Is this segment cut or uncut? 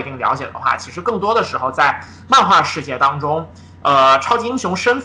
uncut